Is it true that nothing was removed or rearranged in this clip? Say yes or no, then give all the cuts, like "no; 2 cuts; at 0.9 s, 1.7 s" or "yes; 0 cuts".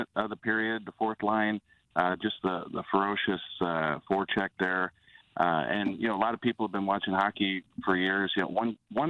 yes; 0 cuts